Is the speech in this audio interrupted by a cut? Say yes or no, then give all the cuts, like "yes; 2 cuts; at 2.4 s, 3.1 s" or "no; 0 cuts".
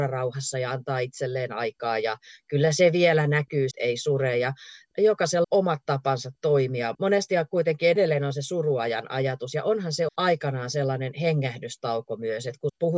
yes; 4 cuts; at 3.7 s, 5.4 s, 6.9 s, 10.1 s